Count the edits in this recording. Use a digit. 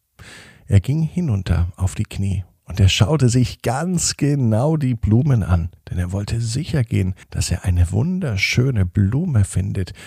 2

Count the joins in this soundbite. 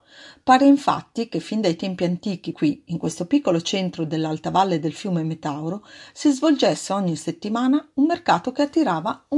1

